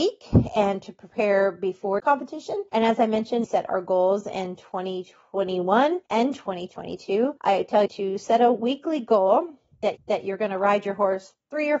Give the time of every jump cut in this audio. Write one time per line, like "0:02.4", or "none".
0:02.0
0:02.7
0:03.4
0:06.1
0:07.4
0:07.9
0:10.0